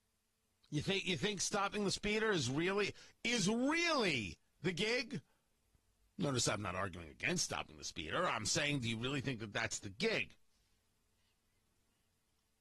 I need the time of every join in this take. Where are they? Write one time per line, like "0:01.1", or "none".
none